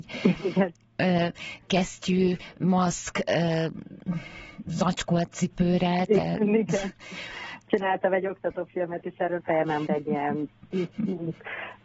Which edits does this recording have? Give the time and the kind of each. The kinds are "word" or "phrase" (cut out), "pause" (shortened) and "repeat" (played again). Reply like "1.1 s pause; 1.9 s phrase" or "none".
9.4 s phrase; 9.9 s word